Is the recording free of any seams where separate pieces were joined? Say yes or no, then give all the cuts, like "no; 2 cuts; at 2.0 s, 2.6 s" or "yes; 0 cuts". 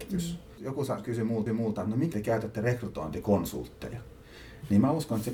no; 2 cuts; at 1.5 s, 2.1 s